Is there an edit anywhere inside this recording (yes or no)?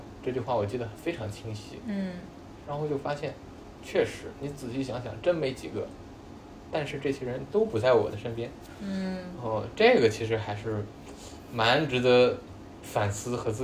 no